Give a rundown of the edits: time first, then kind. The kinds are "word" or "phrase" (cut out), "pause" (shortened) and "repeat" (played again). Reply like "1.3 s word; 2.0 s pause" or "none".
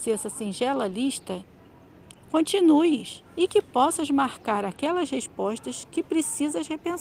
3.3 s pause